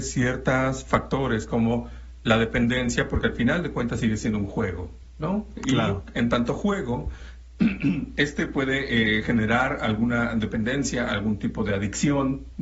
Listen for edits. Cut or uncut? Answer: uncut